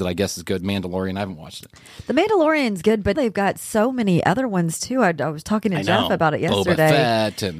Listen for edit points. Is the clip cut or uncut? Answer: cut